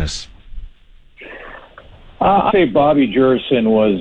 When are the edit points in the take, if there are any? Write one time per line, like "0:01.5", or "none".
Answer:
0:02.5